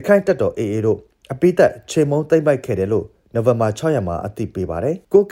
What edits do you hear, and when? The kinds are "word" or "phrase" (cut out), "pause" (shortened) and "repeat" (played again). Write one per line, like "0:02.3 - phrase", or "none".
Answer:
none